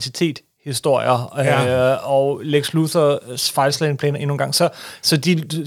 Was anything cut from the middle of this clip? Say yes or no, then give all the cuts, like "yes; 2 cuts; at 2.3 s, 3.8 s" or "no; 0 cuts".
no; 0 cuts